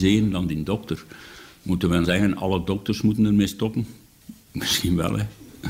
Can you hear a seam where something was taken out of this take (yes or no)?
yes